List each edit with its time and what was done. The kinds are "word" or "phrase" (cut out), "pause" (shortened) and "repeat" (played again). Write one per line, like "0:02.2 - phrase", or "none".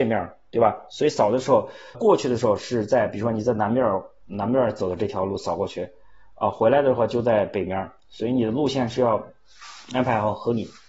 0:01.9 - word